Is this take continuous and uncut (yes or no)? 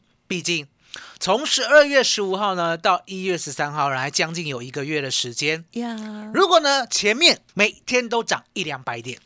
no